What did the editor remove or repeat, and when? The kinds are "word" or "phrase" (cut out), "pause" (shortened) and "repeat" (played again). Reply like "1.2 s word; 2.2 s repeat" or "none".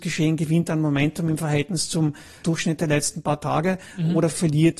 2.4 s word